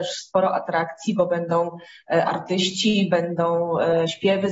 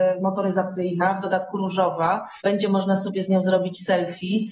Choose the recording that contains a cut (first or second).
second